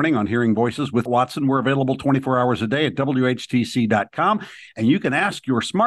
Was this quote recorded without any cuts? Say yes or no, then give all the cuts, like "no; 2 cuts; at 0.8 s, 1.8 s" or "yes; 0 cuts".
no; 1 cut; at 1.1 s